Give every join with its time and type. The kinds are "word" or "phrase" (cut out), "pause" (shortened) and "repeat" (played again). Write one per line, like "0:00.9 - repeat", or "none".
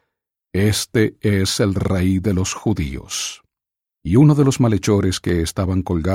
0:03.8 - pause